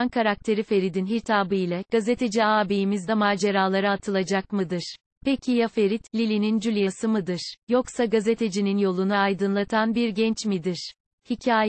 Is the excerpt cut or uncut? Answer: cut